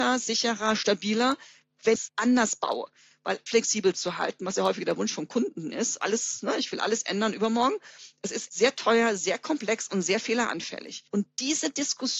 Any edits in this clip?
yes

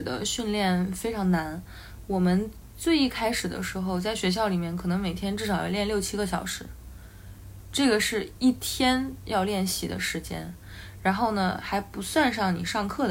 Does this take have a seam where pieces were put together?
no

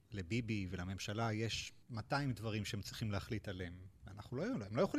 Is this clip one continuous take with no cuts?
no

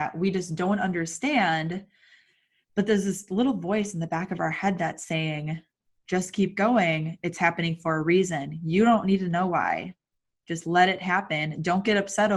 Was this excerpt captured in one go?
yes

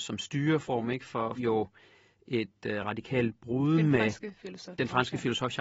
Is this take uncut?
no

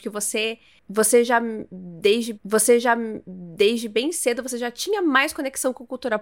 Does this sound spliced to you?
yes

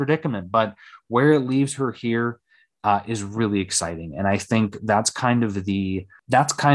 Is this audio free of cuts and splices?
yes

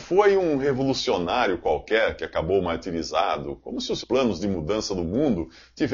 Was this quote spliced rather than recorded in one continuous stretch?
yes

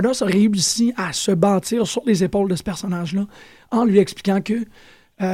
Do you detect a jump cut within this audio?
no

